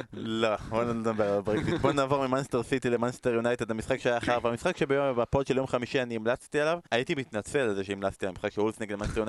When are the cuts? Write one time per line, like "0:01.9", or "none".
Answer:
0:06.9